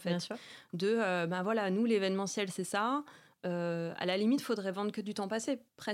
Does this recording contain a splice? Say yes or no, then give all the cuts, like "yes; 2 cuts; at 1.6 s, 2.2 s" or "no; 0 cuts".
no; 0 cuts